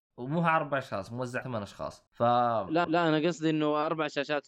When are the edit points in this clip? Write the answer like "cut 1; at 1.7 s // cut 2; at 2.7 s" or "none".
cut 1; at 1.4 s // cut 2; at 2.1 s // cut 3; at 2.8 s

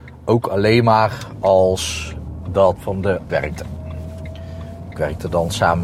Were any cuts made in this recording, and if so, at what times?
cut 1; at 2.8 s // cut 2; at 3.3 s

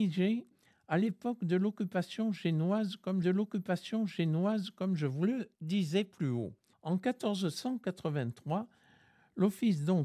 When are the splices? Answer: cut 1; at 3.2 s // cut 2; at 5.6 s // cut 3; at 6.7 s

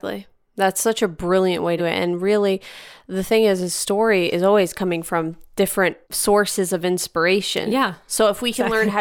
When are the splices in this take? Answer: cut 1; at 1.8 s // cut 2; at 6.0 s

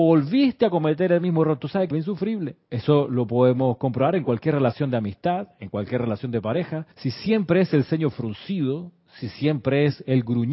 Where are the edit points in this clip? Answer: cut 1; at 1.9 s // cut 2; at 2.6 s // cut 3; at 6.9 s

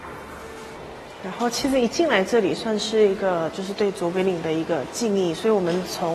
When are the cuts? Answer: cut 1; at 1.1 s

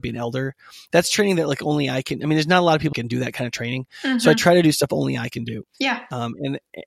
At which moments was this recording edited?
cut 1; at 2.9 s // cut 2; at 5.7 s

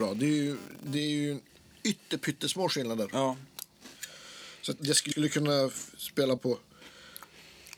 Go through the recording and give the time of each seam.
cut 1; at 1.5 s // cut 2; at 4.8 s // cut 3; at 5.1 s // cut 4; at 6.4 s

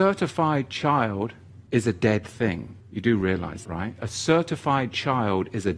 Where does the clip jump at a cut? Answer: cut 1; at 1.7 s // cut 2; at 2.8 s // cut 3; at 3.6 s

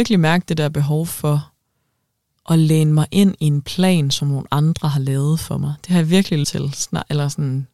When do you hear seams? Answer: cut 1; at 6.4 s

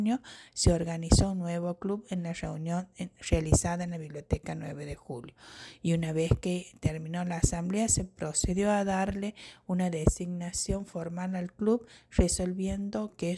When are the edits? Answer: none

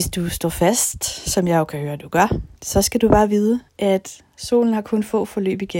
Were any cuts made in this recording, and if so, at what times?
cut 1; at 2.6 s // cut 2; at 3.7 s

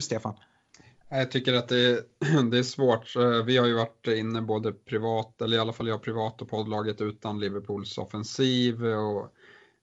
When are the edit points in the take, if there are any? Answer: none

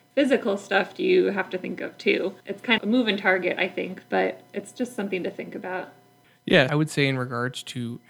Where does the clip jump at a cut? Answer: cut 1; at 2.4 s // cut 2; at 2.8 s // cut 3; at 6.7 s

